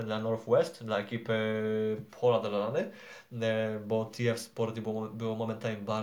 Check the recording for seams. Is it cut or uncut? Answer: uncut